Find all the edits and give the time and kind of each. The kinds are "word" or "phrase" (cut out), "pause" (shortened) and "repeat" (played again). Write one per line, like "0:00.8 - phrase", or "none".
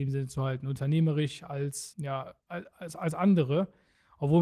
0:01.9 - word
0:02.4 - pause

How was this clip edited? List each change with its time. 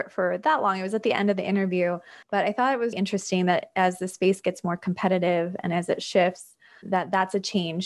0:02.2 - pause
0:02.9 - word
0:06.8 - word

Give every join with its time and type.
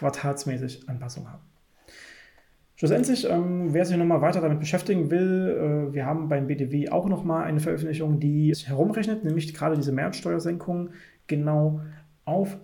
0:08.5 - word

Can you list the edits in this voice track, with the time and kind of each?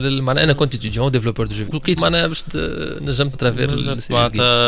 0:01.7 - word
0:02.0 - word
0:03.3 - word

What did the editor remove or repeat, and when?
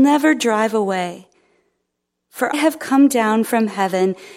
0:02.5 - word

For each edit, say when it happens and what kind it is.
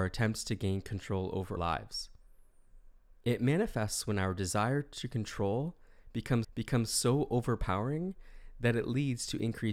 0:01.6 - word
0:06.4 - repeat

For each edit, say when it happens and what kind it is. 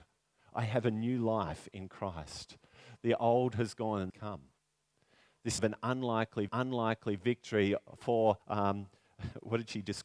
0:04.1 - phrase
0:05.6 - word
0:06.5 - repeat
0:08.4 - pause

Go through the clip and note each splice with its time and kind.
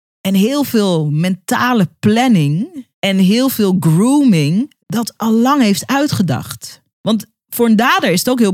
0:02.9 - pause
0:04.8 - pause
0:06.9 - pause

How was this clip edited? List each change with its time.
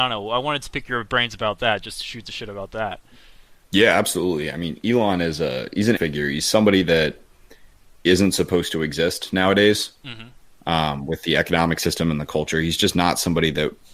0:03.6 - pause
0:06.0 - word
0:08.1 - word
0:10.6 - pause

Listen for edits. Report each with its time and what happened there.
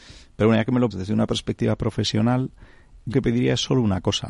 0:00.9 - word
0:03.1 - word

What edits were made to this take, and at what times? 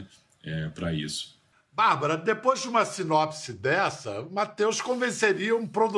none

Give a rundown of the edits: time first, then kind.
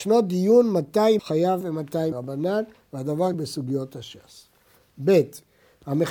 0:01.2 - word
0:01.6 - word
0:02.1 - word
0:03.3 - word

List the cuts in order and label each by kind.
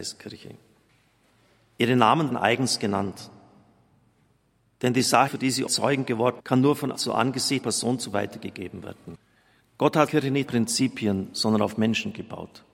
0:02.3 - word
0:05.3 - word
0:05.7 - word
0:06.4 - word
0:06.9 - word
0:07.6 - word
0:08.1 - word
0:10.1 - word
0:10.5 - word

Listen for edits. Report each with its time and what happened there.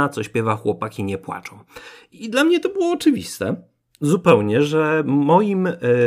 none

